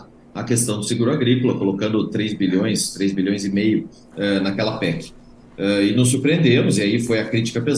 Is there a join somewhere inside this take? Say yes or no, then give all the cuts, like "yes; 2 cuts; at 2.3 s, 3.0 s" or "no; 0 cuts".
no; 0 cuts